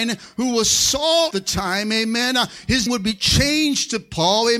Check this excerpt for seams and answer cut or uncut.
cut